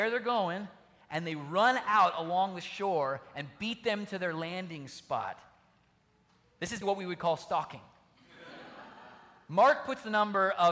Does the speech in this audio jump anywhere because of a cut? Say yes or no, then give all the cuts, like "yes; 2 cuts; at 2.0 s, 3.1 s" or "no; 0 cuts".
yes; 1 cut; at 6.8 s